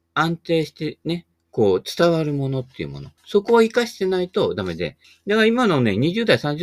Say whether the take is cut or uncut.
cut